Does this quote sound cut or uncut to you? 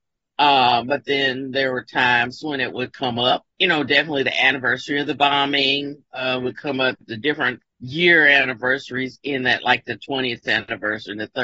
cut